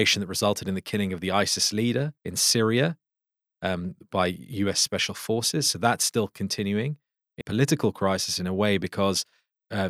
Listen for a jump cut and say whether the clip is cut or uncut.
cut